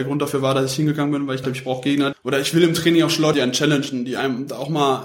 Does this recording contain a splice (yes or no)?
yes